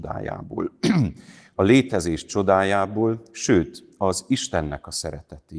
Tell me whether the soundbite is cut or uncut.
uncut